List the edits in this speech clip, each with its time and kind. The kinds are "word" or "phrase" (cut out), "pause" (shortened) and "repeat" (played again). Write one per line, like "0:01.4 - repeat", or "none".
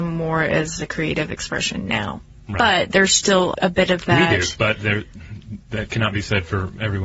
0:03.5 - word

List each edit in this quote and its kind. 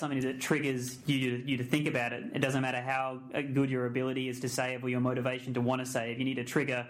none

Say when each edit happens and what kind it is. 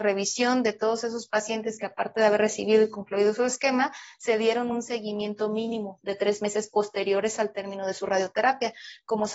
none

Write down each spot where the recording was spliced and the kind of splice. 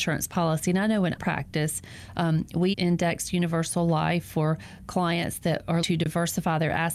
0:01.2 - word
0:02.7 - word
0:05.8 - word

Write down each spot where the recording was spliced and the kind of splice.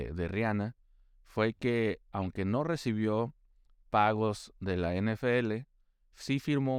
none

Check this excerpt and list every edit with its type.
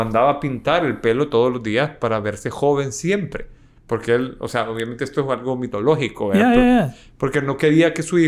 none

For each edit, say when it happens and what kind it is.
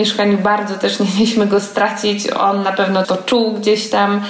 0:03.0 - word

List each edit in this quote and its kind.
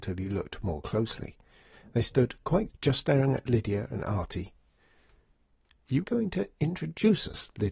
0:02.7 - word
0:06.0 - word

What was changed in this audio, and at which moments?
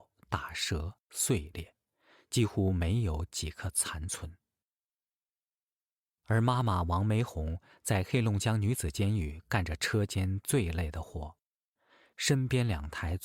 none

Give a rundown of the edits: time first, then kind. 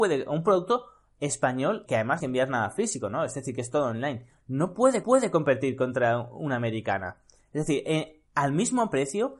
0:01.9 - word
0:02.2 - phrase
0:05.0 - repeat
0:08.3 - pause

